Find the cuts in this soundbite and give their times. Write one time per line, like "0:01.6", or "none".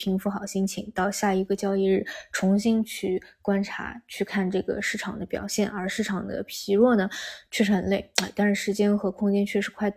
none